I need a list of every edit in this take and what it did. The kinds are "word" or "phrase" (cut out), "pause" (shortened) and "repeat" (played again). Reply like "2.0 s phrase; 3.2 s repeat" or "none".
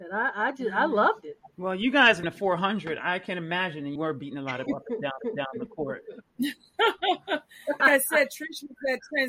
1.5 s pause; 2.2 s word; 4.0 s word; 4.7 s word; 5.2 s repeat; 7.8 s word